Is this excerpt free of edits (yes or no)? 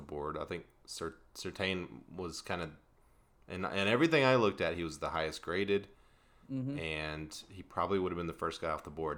yes